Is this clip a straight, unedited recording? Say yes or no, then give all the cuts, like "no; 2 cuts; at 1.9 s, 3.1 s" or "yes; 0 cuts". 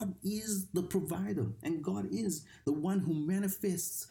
yes; 0 cuts